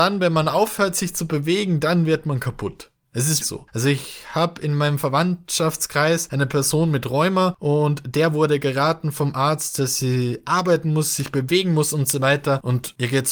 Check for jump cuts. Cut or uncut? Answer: cut